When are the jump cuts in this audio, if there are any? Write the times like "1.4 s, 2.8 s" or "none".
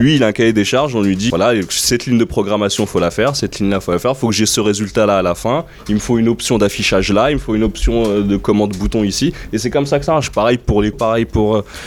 1.3 s, 10.9 s